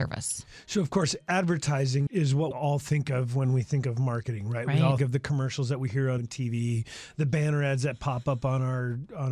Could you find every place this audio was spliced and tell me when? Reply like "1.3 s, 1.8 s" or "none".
2.1 s, 2.5 s, 5.0 s, 6.2 s